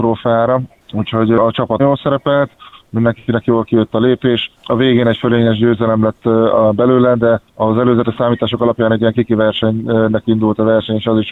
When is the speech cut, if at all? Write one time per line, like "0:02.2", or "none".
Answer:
0:01.8
0:04.5
0:07.5